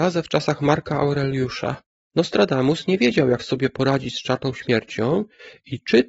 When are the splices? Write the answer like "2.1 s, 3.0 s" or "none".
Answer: none